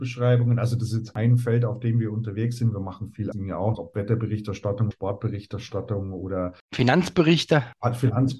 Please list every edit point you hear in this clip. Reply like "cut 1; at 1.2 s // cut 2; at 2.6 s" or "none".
cut 1; at 3.3 s // cut 2; at 3.7 s // cut 3; at 4.9 s

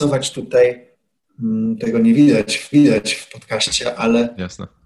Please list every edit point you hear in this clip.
cut 1; at 2.7 s

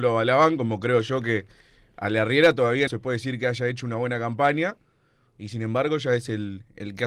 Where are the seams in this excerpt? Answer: cut 1; at 2.9 s

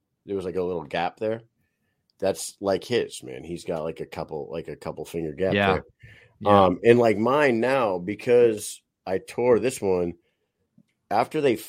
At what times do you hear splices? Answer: none

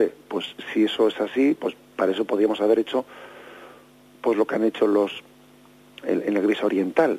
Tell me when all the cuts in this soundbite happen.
none

